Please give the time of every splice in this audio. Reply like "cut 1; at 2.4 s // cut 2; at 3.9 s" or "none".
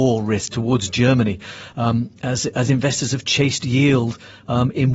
none